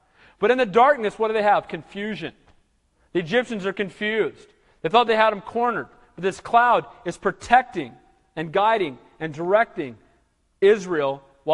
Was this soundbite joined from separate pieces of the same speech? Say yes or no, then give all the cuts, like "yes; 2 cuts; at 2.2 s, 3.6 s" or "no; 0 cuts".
no; 0 cuts